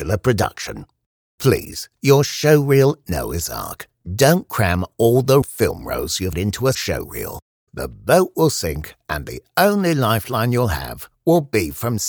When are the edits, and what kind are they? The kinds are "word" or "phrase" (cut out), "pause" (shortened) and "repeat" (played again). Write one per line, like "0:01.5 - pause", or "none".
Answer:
0:03.0 - word
0:05.4 - word
0:06.3 - word
0:06.7 - word